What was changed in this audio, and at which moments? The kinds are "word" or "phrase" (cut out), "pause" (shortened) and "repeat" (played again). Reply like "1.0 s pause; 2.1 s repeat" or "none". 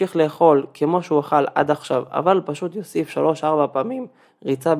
none